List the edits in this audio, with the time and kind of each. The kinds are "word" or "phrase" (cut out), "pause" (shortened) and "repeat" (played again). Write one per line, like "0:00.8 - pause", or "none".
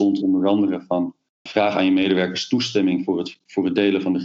0:01.5 - word